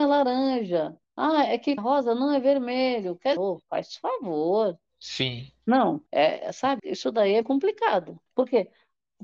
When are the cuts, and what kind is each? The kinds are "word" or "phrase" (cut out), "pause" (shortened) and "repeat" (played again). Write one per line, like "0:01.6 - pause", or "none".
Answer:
0:01.0 - pause
0:01.8 - phrase
0:03.4 - word
0:04.9 - pause
0:06.1 - pause
0:06.8 - word
0:07.4 - word
0:08.3 - pause